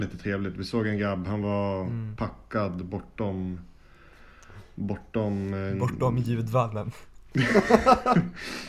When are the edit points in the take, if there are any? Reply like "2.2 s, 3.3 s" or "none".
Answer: none